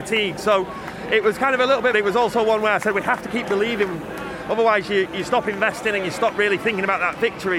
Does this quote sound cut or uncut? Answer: cut